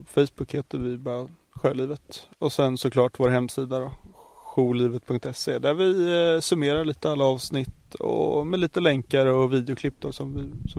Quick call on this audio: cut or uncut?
uncut